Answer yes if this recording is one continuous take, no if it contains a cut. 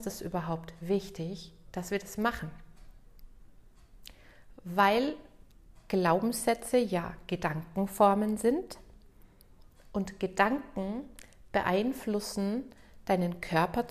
yes